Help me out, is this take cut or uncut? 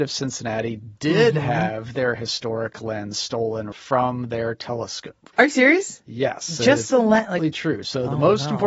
cut